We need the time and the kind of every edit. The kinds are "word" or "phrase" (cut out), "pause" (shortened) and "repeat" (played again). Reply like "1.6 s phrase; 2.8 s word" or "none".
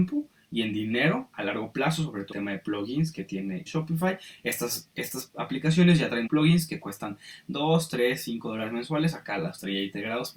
2.3 s phrase; 3.7 s phrase; 6.3 s word